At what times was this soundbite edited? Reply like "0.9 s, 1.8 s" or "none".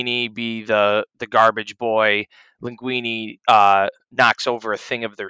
none

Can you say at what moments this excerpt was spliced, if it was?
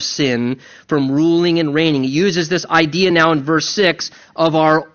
none

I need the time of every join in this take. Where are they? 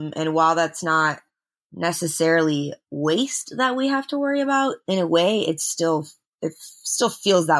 none

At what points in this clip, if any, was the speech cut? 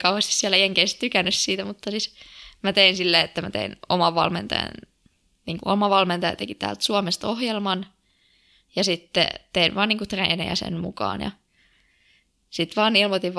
5.6 s

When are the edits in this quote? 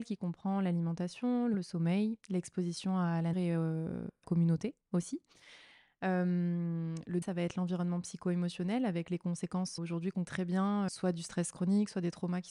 1.5 s, 3.3 s, 4.2 s, 7.2 s, 9.8 s, 10.2 s, 10.9 s

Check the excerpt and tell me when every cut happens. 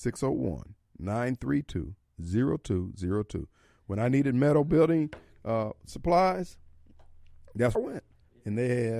7.7 s

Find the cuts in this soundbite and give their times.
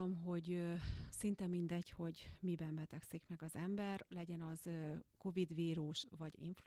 none

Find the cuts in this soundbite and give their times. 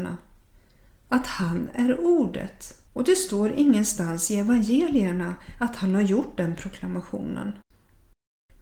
2.9 s

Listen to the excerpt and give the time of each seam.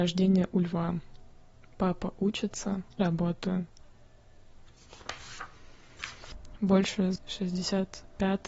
3.0 s, 7.2 s

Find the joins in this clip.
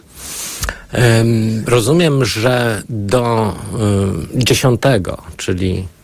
none

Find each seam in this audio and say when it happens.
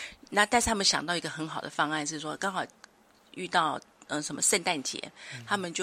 none

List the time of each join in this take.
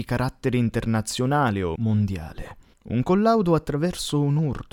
1.8 s, 2.7 s

